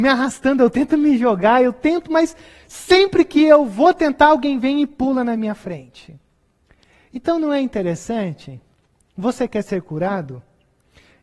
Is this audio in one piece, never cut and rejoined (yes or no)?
yes